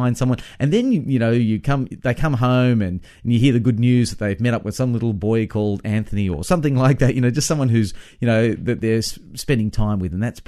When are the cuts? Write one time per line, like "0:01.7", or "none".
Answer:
none